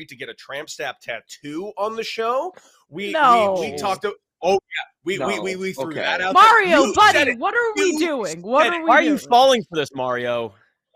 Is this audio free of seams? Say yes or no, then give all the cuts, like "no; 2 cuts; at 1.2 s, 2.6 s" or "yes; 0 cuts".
yes; 0 cuts